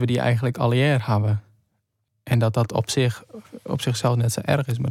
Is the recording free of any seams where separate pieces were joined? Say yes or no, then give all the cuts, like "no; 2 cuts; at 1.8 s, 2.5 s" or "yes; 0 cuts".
yes; 0 cuts